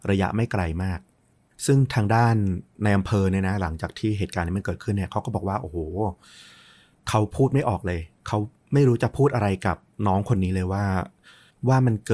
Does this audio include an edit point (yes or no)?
no